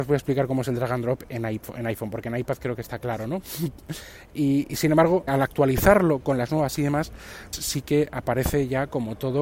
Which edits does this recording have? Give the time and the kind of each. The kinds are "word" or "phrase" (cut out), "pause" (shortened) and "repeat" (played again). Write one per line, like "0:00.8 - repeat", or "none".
0:04.3 - word
0:05.3 - word
0:06.8 - word
0:07.5 - word